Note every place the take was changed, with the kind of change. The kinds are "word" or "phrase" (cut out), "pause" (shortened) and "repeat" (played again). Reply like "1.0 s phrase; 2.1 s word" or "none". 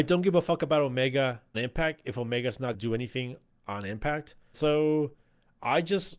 1.5 s word; 2.7 s word; 4.5 s word